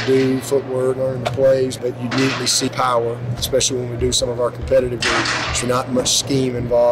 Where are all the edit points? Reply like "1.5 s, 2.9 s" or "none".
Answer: 1.0 s, 1.8 s, 2.1 s, 2.7 s, 5.0 s, 5.6 s